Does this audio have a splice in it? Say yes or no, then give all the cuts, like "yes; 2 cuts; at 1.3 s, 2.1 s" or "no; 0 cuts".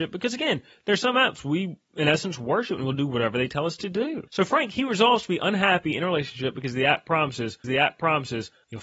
yes; 2 cuts; at 4.3 s, 7.6 s